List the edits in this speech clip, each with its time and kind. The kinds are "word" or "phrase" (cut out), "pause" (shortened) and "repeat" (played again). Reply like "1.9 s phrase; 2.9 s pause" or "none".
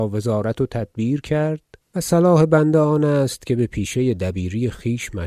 1.8 s pause